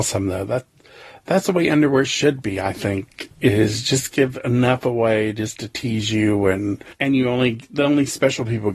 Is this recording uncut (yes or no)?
no